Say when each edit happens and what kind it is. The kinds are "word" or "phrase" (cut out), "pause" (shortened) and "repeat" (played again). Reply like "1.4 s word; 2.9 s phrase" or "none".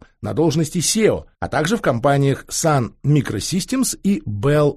1.3 s pause